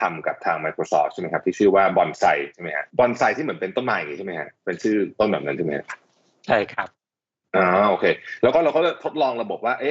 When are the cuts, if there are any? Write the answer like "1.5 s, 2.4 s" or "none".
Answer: 2.5 s, 2.9 s, 4.6 s